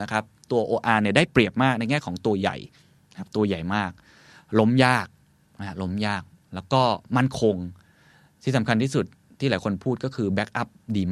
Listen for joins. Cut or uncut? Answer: uncut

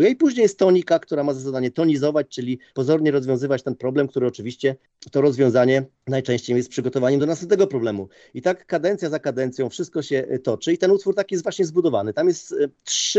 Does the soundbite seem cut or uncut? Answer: uncut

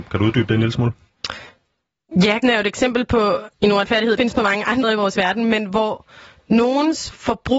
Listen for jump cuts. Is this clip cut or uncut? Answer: cut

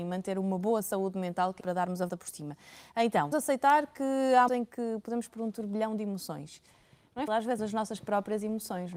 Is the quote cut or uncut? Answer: cut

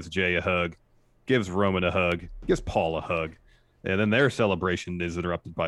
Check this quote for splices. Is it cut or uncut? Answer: uncut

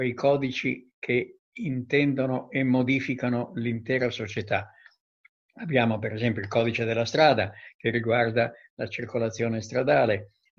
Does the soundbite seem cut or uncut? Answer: uncut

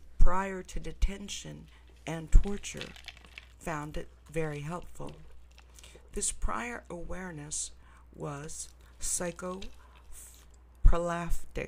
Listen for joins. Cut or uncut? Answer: uncut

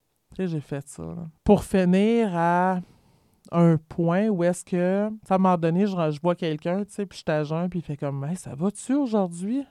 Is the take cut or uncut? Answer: cut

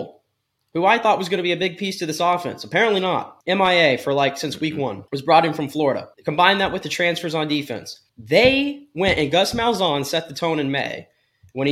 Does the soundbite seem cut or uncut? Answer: cut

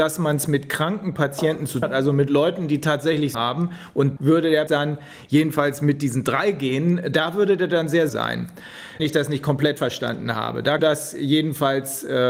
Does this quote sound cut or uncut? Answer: cut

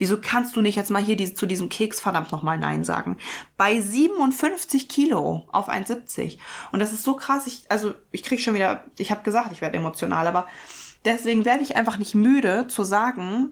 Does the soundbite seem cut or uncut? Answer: uncut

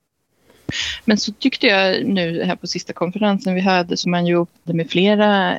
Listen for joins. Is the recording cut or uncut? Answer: cut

